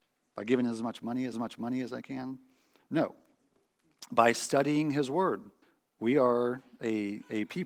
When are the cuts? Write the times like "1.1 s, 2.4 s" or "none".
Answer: 1.3 s, 5.6 s

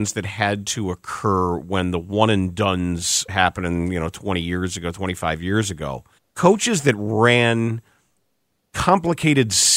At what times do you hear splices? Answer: 3.3 s, 6.2 s

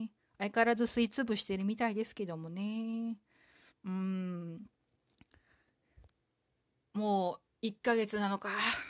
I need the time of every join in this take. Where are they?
3.7 s, 7.5 s

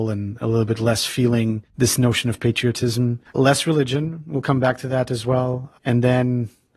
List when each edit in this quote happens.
1.7 s, 3.3 s

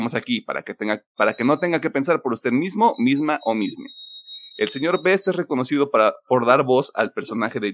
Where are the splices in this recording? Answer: none

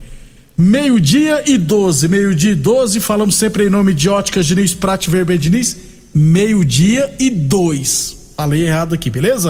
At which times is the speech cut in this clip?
none

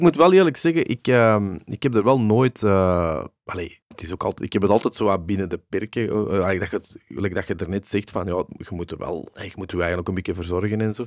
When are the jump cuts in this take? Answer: 3.8 s, 9.3 s

